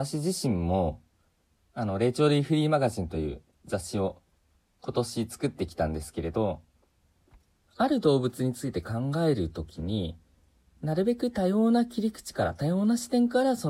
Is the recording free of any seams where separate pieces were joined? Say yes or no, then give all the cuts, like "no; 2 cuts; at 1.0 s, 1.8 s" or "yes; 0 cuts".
yes; 0 cuts